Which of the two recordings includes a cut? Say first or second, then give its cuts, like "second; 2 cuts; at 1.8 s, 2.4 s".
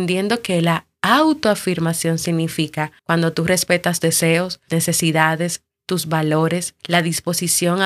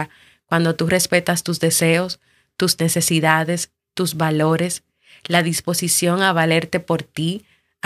first; 4 cuts; at 3.0 s, 4.0 s, 4.7 s, 6.8 s